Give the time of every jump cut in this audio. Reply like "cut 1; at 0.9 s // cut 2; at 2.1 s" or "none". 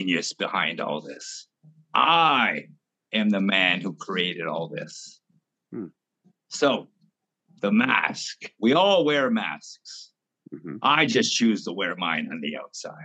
none

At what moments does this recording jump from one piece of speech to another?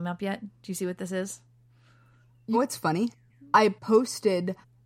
cut 1; at 2.5 s // cut 2; at 3.3 s

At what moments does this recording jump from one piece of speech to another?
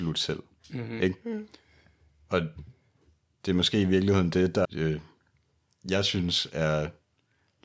cut 1; at 4.6 s

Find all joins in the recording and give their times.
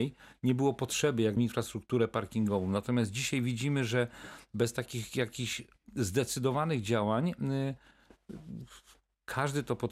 cut 1; at 1.4 s

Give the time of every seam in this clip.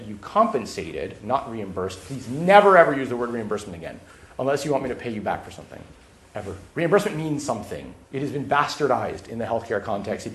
cut 1; at 6.7 s // cut 2; at 8.0 s

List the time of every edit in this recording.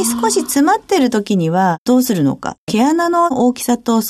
cut 1; at 2.6 s

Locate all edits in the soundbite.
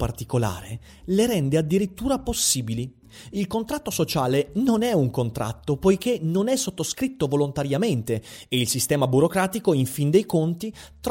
none

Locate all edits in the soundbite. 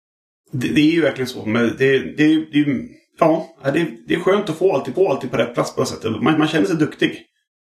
cut 1; at 4.9 s

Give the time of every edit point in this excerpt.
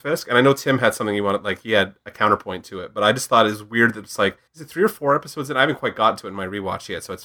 cut 1; at 4.5 s

